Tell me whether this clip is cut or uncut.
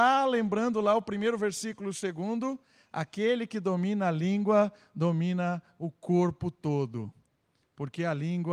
uncut